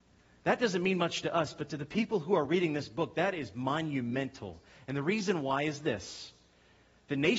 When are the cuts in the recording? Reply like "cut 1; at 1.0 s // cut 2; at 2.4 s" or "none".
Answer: none